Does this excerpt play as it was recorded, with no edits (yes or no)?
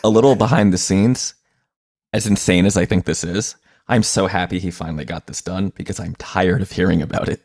yes